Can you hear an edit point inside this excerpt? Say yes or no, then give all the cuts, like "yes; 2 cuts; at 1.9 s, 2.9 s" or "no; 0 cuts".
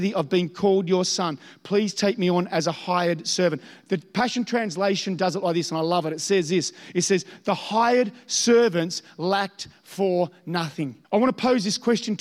yes; 1 cut; at 11.0 s